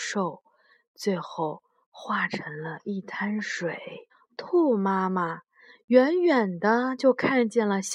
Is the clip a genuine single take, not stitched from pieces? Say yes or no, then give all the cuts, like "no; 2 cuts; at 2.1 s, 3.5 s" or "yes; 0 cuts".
no; 1 cut; at 4.1 s